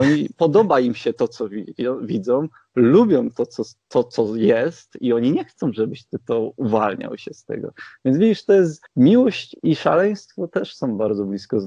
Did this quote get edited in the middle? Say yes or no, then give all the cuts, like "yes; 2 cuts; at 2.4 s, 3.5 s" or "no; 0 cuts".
yes; 1 cut; at 8.9 s